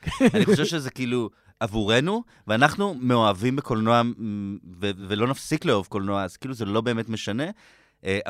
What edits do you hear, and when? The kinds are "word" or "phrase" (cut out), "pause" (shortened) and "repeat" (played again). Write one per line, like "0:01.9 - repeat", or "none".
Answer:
none